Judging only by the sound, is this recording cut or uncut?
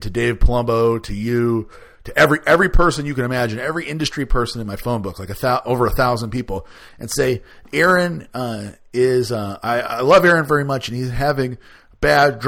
uncut